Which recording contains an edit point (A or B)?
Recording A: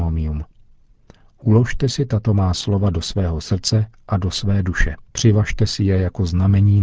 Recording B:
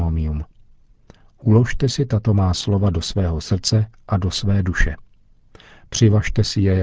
A